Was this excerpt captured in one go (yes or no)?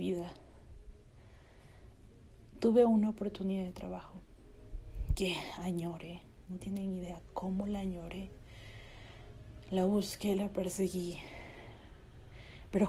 yes